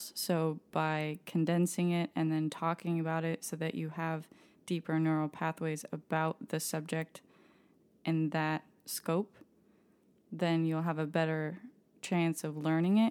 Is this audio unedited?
yes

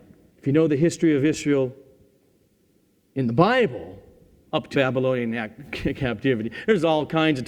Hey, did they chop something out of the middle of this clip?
yes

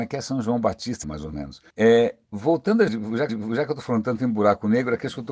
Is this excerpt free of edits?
no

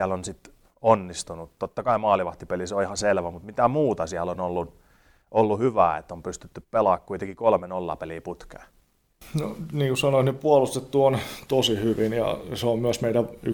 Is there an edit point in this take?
no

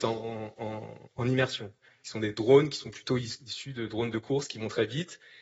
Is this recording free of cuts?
yes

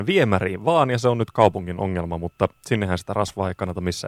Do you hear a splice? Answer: no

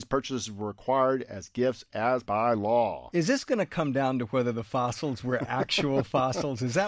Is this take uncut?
no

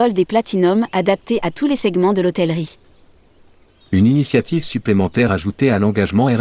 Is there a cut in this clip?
no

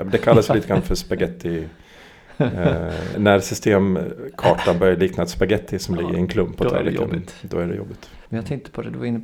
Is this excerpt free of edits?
no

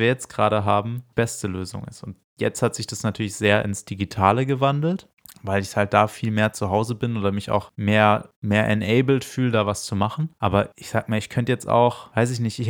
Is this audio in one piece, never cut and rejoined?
yes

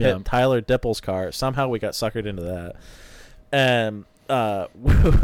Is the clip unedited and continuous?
yes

